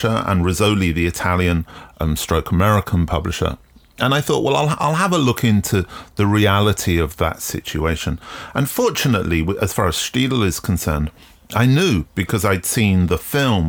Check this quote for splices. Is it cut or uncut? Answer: uncut